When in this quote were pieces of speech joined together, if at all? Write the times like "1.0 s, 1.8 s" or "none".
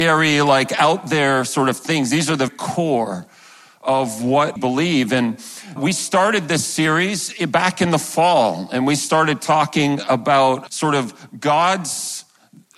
2.5 s, 4.6 s, 5.8 s, 10.7 s

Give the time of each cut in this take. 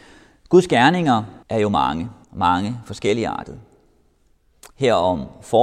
1.4 s, 2.2 s

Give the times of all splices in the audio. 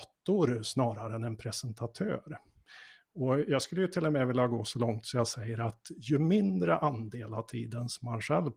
none

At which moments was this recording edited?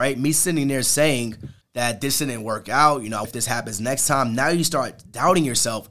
1.6 s, 3.2 s

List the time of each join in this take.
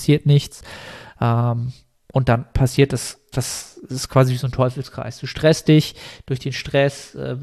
3.3 s

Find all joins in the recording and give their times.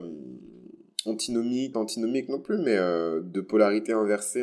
1.7 s

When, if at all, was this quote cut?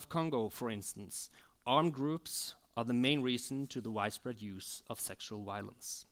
none

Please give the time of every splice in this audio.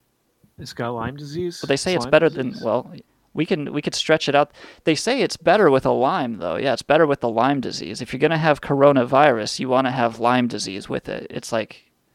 3.1 s

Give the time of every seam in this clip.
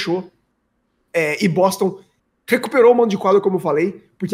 none

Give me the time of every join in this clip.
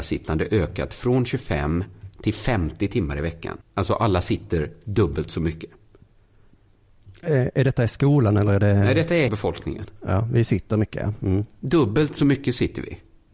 3.6 s, 9.3 s

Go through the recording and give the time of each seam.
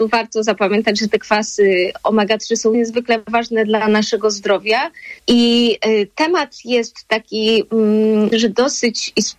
2.7 s, 5.2 s, 8.3 s

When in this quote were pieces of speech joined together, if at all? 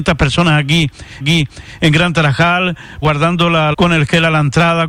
1.2 s, 3.0 s, 3.7 s

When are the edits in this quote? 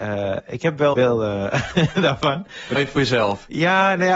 0.9 s, 2.8 s

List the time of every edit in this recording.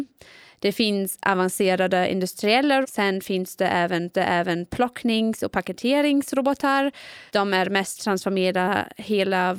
2.8 s, 4.1 s, 7.3 s, 8.0 s

